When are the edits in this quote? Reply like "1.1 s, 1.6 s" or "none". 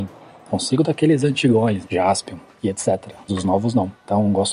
1.8 s, 3.3 s